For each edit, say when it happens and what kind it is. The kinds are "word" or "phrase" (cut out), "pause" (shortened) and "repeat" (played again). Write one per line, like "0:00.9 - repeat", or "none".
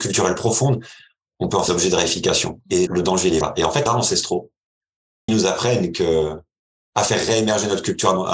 0:01.7 - word
0:02.9 - word
0:03.4 - word
0:03.9 - word
0:05.3 - word